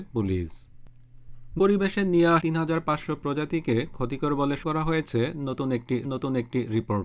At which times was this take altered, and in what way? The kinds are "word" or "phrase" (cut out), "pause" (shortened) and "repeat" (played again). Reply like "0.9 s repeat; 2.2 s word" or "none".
1.6 s word; 2.4 s word; 4.6 s word; 6.0 s repeat